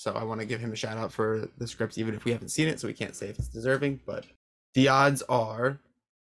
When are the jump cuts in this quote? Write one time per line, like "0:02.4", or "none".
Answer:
none